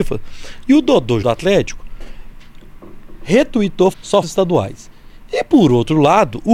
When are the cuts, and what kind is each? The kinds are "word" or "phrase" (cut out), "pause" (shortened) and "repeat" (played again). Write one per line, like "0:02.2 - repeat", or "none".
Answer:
0:01.2 - word
0:03.9 - word
0:04.2 - phrase